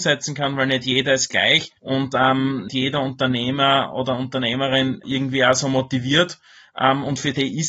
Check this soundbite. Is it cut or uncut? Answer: cut